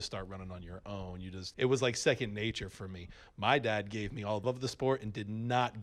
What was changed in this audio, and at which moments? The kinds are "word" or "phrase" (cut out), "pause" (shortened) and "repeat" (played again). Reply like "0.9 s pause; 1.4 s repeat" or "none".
1.5 s word; 4.4 s word